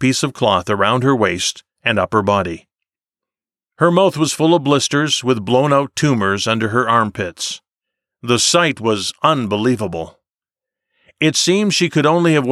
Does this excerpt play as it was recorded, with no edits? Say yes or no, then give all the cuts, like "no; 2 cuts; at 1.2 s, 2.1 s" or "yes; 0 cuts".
yes; 0 cuts